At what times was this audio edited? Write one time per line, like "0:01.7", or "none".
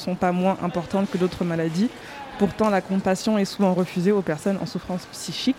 none